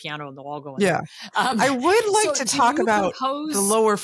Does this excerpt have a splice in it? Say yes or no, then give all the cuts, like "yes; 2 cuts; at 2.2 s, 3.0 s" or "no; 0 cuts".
no; 0 cuts